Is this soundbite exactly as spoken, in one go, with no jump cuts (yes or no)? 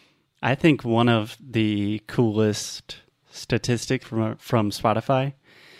no